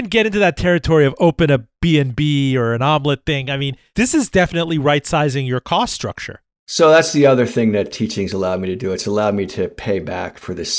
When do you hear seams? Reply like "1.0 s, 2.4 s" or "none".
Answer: none